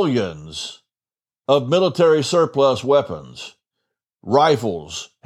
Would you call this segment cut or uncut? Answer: uncut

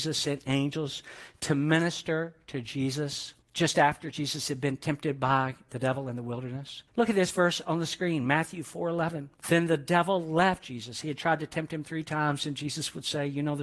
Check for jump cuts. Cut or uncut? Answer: cut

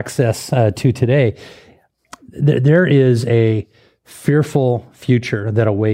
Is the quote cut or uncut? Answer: uncut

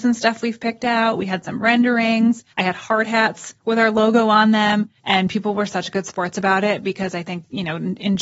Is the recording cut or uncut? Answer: cut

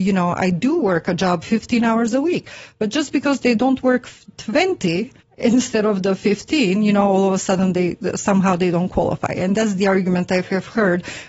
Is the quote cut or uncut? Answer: cut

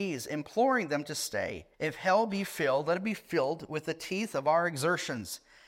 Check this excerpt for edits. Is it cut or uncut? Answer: cut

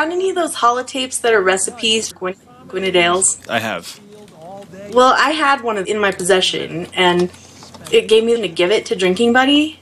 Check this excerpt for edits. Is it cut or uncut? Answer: cut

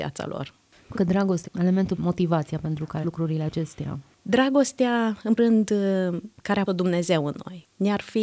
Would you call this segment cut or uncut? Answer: cut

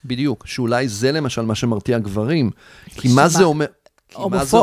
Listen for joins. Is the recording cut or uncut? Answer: uncut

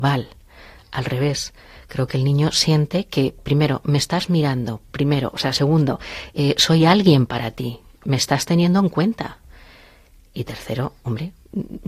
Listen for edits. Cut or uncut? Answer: uncut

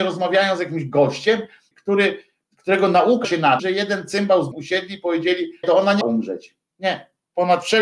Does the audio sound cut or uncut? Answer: cut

